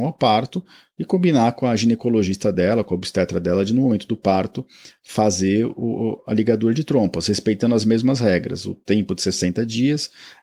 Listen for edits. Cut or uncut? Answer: uncut